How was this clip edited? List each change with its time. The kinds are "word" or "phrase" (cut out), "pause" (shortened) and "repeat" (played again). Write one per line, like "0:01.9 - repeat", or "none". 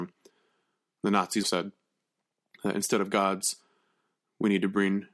0:01.4 - word

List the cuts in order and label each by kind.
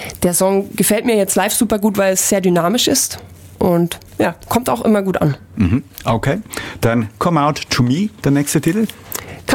none

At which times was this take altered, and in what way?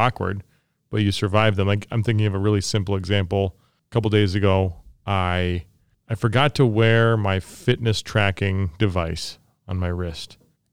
none

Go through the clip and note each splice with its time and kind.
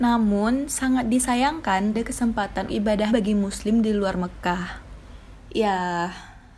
0:01.9 - phrase
0:02.7 - word
0:03.1 - word

